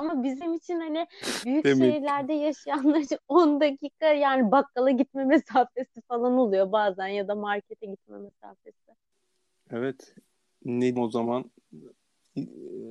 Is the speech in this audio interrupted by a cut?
yes; 1 cut; at 11.0 s

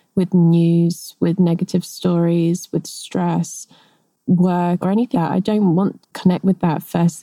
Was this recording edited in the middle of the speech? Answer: yes; 3 cuts; at 4.8 s, 5.1 s, 6.0 s

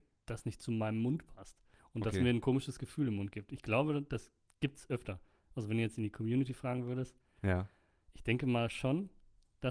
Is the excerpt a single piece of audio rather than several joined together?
yes; 0 cuts

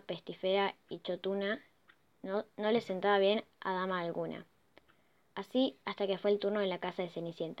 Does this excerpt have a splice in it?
no; 0 cuts

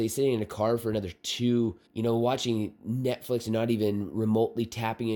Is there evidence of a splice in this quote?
yes; 1 cut; at 1.9 s

